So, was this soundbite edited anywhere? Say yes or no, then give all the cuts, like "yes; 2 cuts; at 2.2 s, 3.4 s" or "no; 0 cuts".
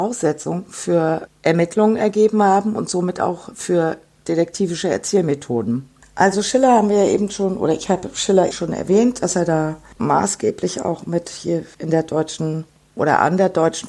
yes; 2 cuts; at 8.5 s, 10.0 s